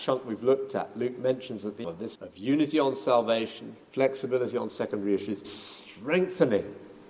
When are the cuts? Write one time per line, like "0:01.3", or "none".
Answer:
0:01.8
0:02.1
0:05.4